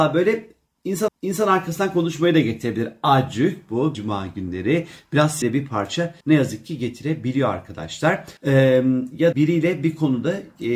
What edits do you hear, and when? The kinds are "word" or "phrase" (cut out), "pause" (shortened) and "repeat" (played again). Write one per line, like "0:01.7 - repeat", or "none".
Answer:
0:01.1 - repeat
0:03.9 - word
0:05.4 - word
0:06.2 - pause
0:08.4 - pause
0:09.3 - phrase